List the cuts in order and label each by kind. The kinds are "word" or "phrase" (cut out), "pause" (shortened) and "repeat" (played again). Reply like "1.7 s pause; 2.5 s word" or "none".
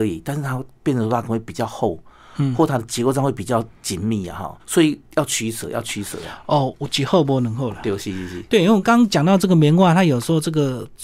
3.7 s pause; 4.6 s pause; 5.1 s pause